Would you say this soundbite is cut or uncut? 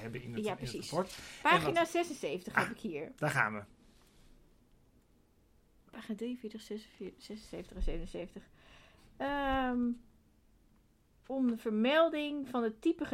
uncut